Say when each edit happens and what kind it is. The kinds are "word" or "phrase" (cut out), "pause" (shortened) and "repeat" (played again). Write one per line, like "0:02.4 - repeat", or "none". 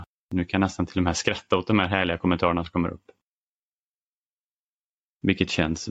none